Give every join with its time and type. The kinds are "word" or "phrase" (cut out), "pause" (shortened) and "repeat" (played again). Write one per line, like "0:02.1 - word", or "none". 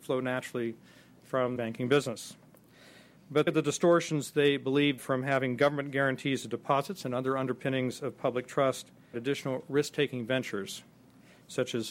0:01.6 - phrase
0:03.5 - phrase
0:05.0 - word
0:09.1 - word